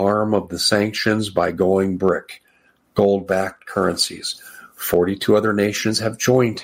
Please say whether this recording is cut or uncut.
uncut